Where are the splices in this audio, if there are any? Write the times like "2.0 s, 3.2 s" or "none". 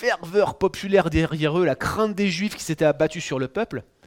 none